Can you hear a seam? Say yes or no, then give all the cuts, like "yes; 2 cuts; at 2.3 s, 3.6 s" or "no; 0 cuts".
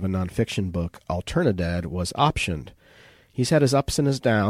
no; 0 cuts